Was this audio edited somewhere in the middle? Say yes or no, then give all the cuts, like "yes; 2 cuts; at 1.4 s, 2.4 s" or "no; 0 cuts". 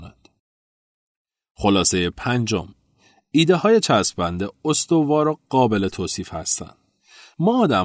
no; 0 cuts